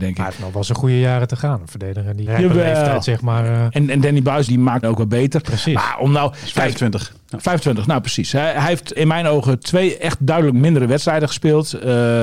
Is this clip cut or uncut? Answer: cut